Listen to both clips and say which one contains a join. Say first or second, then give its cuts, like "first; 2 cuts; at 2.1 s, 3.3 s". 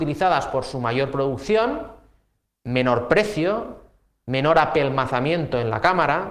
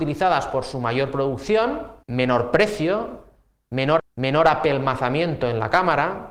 second; 2 cuts; at 2.0 s, 4.0 s